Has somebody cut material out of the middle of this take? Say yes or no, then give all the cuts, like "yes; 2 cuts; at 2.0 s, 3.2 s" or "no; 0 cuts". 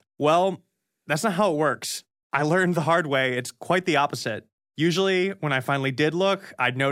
no; 0 cuts